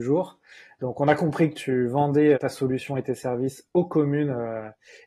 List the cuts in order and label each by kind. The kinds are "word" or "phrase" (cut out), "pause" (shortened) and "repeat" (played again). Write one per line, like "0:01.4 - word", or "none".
0:02.3 - word